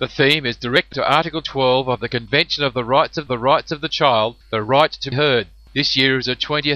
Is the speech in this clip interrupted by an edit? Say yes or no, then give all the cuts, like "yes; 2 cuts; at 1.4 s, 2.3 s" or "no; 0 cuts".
yes; 4 cuts; at 0.9 s, 3.3 s, 4.4 s, 5.1 s